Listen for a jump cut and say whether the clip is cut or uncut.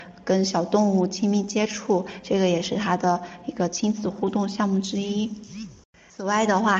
uncut